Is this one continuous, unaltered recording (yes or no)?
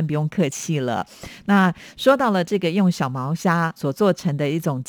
no